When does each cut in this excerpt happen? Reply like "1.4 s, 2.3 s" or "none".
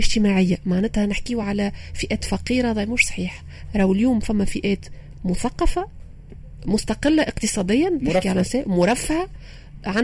none